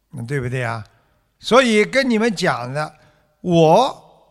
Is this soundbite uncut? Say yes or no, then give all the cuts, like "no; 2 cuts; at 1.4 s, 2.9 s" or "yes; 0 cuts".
yes; 0 cuts